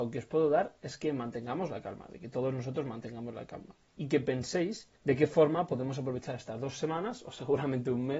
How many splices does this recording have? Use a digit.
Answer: 1